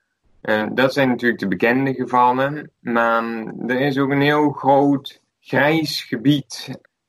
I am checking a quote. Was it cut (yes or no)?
no